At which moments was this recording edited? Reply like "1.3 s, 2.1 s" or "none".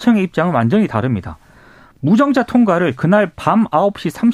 none